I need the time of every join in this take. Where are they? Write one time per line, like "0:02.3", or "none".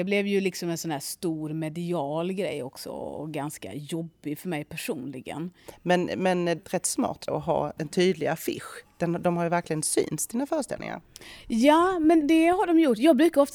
0:06.6
0:07.3
0:07.8
0:12.2